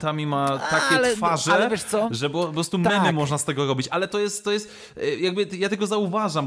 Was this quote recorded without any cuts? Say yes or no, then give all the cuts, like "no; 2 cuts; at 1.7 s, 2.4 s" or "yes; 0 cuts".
no; 1 cut; at 3.9 s